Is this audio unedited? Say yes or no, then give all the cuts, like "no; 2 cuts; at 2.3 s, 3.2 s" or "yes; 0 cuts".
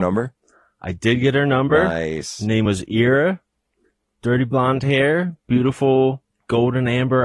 yes; 0 cuts